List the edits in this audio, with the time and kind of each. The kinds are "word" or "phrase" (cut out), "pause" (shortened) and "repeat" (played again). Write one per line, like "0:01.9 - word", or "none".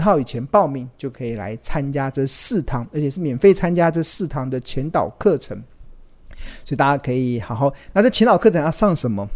none